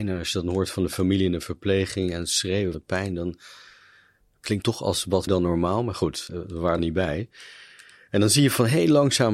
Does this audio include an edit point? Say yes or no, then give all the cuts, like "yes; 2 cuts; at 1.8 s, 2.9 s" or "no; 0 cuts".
yes; 5 cuts; at 2.7 s, 4.6 s, 5.3 s, 6.3 s, 6.8 s